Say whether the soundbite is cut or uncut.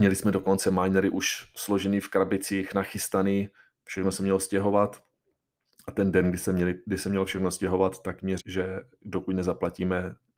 cut